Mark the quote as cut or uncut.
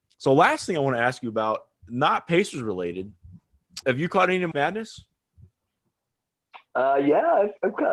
cut